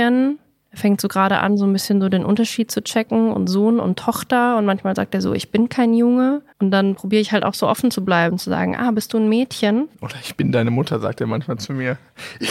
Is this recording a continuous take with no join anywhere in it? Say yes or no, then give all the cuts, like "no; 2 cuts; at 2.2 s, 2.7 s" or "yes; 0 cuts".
no; 2 cuts; at 6.5 s, 9.9 s